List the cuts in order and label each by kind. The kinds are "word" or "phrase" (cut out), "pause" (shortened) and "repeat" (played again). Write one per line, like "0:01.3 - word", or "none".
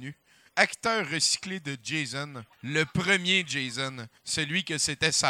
0:02.5 - pause
0:04.2 - pause